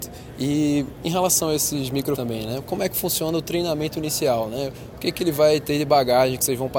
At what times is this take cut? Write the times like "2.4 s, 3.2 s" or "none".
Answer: 1.0 s, 2.2 s